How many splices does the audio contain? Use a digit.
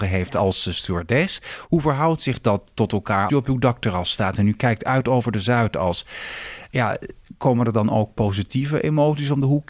1